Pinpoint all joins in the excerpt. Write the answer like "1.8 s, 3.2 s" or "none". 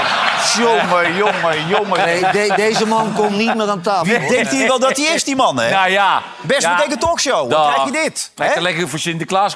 none